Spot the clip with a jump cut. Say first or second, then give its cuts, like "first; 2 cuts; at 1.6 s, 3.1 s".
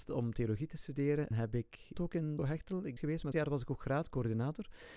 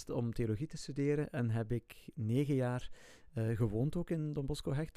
first; 5 cuts; at 1.3 s, 1.9 s, 2.4 s, 3.0 s, 3.3 s